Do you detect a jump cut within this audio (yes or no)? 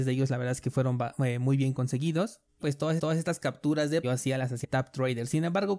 yes